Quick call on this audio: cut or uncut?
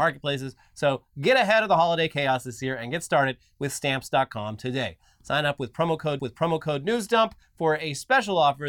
cut